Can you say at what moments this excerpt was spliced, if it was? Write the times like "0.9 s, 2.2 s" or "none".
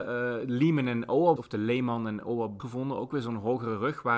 1.4 s, 2.6 s